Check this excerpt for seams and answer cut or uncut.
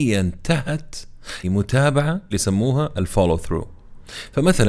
cut